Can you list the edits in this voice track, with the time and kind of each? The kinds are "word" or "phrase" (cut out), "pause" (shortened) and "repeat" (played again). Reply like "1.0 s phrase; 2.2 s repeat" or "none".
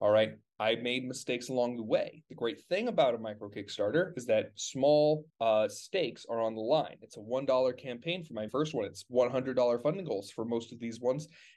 5.3 s pause; 8.5 s word